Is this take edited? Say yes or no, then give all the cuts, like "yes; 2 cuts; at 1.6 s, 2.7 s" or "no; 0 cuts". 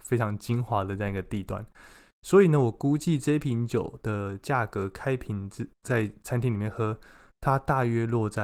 no; 0 cuts